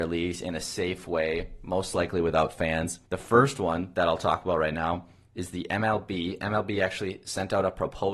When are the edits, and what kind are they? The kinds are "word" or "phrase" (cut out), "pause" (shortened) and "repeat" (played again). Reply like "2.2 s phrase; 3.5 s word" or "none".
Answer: 3.1 s pause